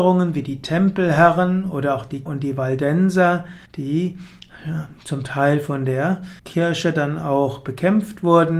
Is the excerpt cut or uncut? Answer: cut